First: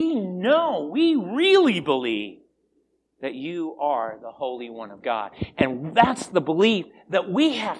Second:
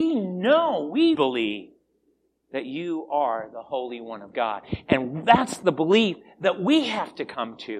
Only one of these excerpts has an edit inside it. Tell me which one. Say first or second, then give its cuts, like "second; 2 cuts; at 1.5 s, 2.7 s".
second; 1 cut; at 1.1 s